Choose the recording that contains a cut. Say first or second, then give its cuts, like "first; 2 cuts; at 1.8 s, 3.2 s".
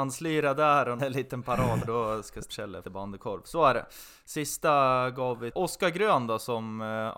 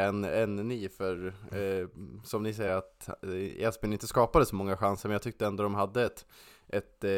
first; 5 cuts; at 1.0 s, 1.8 s, 2.5 s, 2.8 s, 5.5 s